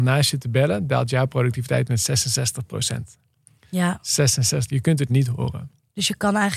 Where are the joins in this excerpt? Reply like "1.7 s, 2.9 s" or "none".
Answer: 5.1 s